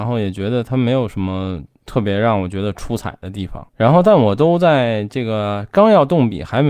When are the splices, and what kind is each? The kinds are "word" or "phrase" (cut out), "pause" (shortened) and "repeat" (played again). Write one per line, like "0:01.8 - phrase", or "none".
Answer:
0:01.7 - pause
0:03.7 - pause

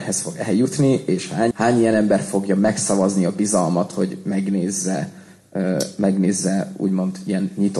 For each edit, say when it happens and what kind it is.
0:01.5 - word

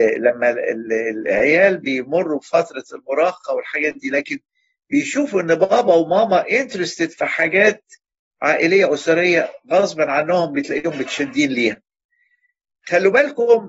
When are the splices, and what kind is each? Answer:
none

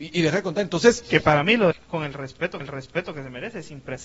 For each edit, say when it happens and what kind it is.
0:01.7 - phrase
0:02.6 - repeat

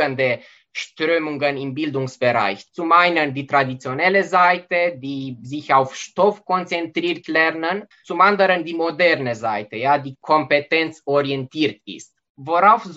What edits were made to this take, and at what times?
0:07.2 - phrase
0:07.9 - pause

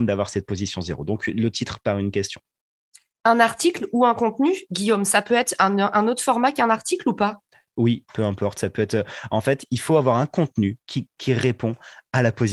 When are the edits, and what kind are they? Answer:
none

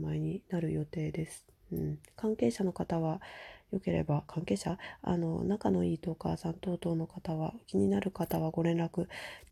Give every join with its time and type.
none

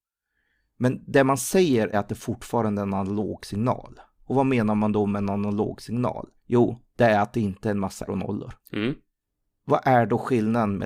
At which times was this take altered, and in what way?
0:01.9 - word
0:06.4 - pause
0:08.1 - word
0:08.6 - pause

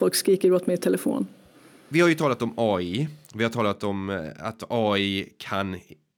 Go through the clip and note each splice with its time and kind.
none

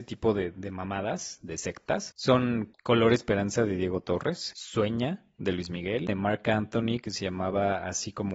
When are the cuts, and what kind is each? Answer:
0:06.1 - word

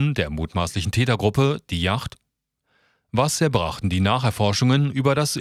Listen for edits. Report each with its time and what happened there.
none

